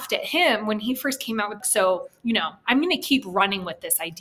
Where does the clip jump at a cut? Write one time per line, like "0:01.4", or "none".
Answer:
0:01.6